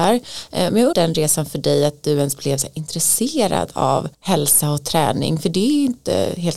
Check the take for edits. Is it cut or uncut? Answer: cut